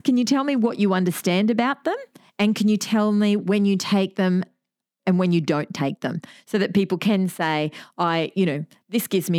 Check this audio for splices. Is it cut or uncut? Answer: uncut